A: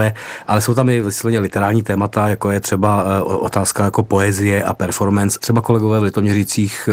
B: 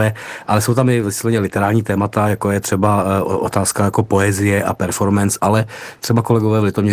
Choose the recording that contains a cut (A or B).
A